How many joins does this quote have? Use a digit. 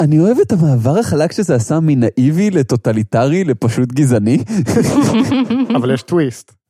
0